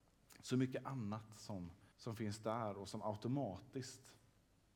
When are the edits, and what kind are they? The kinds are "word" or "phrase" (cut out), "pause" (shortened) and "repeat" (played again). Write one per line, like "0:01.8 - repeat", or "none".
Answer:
0:01.9 - pause

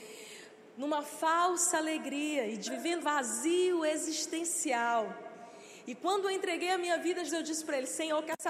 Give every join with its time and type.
0:02.7 - word
0:03.0 - word
0:07.3 - word

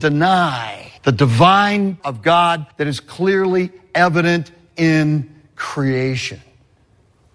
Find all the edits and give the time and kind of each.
0:01.0 - pause
0:02.0 - word
0:02.7 - pause

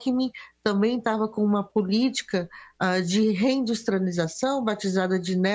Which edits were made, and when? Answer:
none

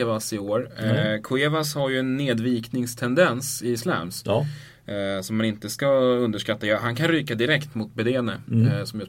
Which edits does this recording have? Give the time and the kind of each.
none

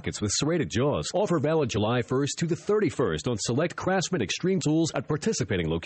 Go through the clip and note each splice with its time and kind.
0:04.6 - word

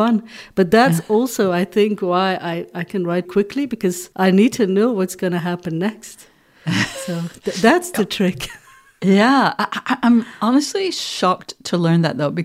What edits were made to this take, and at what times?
0:03.2 - word
0:04.1 - pause

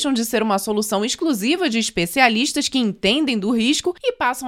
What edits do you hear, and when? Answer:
none

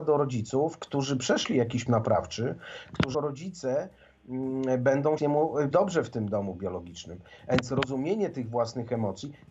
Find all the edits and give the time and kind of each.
0:01.9 - word
0:03.1 - word
0:05.2 - phrase
0:05.7 - phrase

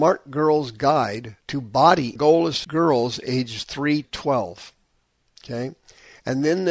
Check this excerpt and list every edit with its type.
0:01.4 - pause
0:02.2 - phrase
0:02.6 - word
0:04.0 - word

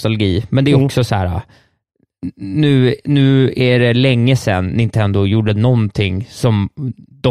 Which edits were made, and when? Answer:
none

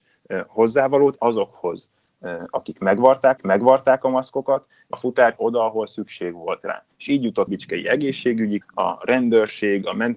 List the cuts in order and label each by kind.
0:01.2 - word
0:03.4 - repeat
0:04.9 - word
0:05.4 - word
0:06.9 - pause
0:07.5 - phrase
0:08.6 - word

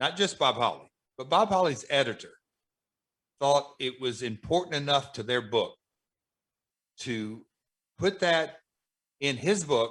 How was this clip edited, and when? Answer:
none

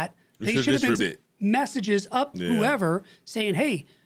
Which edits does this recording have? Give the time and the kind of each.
0:01.0 - word
0:02.3 - word

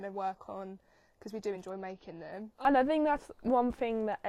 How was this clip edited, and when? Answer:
none

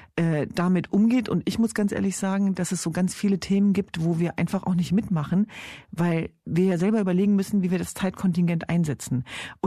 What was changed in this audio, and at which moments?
none

